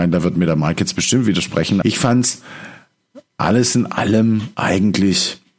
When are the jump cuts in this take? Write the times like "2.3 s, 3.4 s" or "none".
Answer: 1.8 s